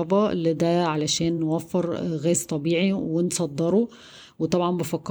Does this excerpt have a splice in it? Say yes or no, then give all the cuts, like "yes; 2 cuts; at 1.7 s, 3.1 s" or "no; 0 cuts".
no; 0 cuts